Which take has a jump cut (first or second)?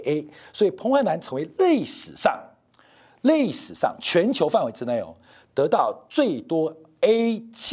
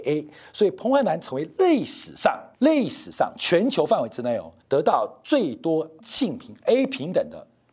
second